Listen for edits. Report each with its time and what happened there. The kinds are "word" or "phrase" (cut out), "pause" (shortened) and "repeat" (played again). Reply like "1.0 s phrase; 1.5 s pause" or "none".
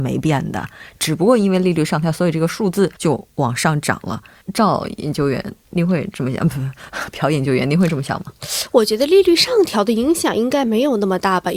3.0 s pause; 4.4 s pause